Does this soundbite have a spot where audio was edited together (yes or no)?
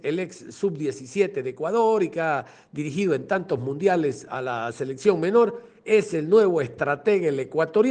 no